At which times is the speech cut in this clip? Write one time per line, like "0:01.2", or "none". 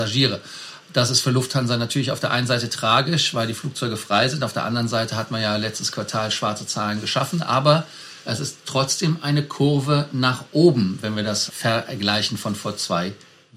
0:11.5